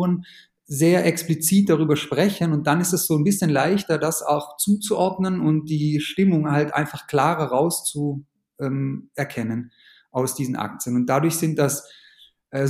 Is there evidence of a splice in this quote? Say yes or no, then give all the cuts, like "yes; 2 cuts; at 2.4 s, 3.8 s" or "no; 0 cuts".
no; 0 cuts